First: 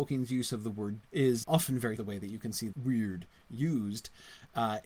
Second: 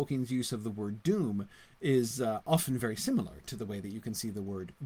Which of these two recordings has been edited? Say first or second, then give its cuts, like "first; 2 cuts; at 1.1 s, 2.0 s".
first; 4 cuts; at 1.0 s, 1.4 s, 2.0 s, 2.7 s